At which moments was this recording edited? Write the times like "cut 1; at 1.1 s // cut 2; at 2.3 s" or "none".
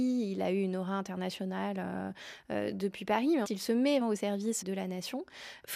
cut 1; at 3.4 s // cut 2; at 4.0 s // cut 3; at 4.6 s